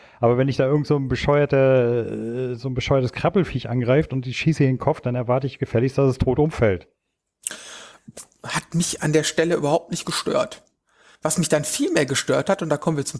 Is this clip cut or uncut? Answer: uncut